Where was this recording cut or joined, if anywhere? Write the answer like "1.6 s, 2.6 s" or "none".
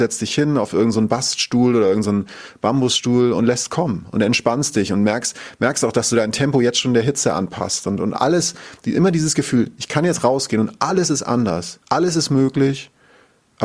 11.8 s